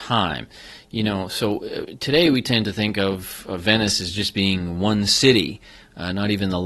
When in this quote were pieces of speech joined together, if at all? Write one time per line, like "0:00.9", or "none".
none